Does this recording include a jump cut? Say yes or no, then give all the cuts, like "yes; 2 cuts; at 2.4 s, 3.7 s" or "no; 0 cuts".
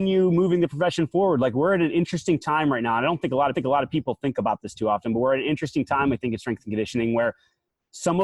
yes; 1 cut; at 3.5 s